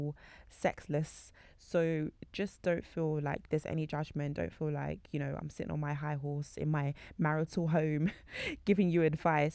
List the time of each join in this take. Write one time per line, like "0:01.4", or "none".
none